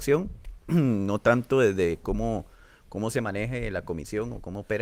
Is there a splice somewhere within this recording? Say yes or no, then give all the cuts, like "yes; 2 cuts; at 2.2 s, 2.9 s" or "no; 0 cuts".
no; 0 cuts